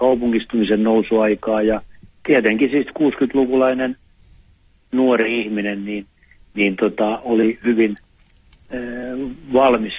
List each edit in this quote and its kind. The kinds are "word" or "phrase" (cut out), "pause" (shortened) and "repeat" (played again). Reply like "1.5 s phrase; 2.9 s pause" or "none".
none